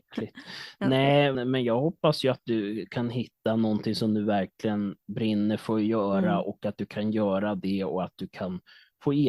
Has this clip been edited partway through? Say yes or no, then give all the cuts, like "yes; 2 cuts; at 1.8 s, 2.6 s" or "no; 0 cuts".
yes; 1 cut; at 1.3 s